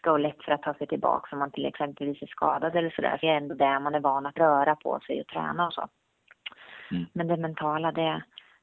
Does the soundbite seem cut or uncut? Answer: cut